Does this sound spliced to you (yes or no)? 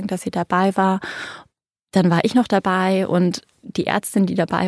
no